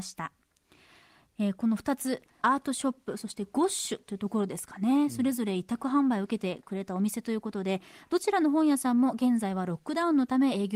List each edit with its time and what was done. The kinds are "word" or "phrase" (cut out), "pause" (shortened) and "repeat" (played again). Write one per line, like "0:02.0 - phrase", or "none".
0:02.4 - word